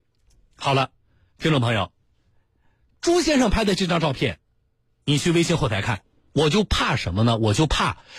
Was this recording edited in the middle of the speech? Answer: no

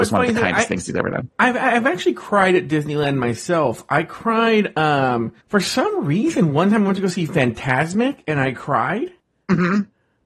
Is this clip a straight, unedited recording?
no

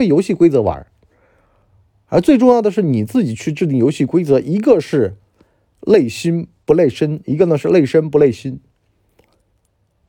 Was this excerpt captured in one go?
yes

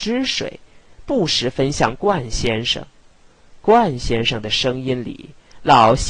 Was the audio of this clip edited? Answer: no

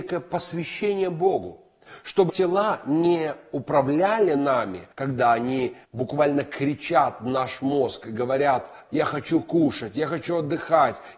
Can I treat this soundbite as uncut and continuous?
no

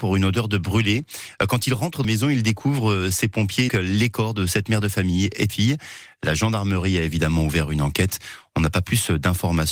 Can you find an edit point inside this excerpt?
yes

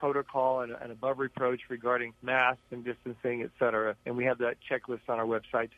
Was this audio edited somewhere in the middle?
yes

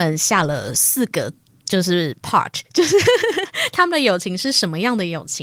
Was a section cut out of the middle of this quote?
no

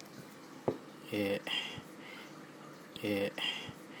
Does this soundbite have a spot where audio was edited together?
yes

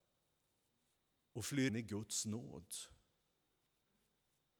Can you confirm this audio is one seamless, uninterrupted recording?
no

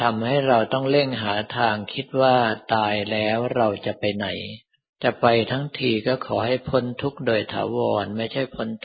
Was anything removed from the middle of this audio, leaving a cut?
yes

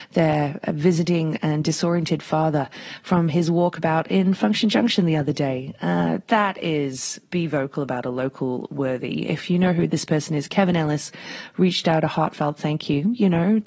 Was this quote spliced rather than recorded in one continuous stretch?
no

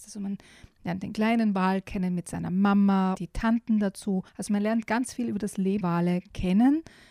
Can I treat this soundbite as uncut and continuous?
no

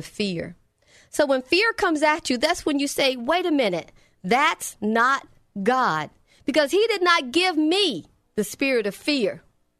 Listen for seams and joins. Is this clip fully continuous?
yes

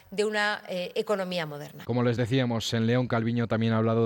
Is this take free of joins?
yes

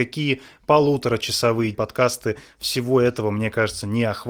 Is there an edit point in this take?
yes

